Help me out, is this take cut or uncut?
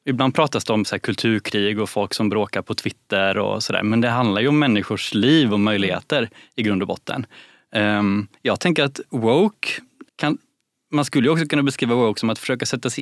cut